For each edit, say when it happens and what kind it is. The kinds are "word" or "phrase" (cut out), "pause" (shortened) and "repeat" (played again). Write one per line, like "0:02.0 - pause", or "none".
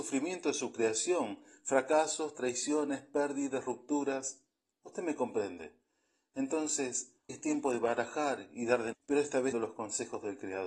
0:07.3 - word
0:08.9 - word
0:09.5 - word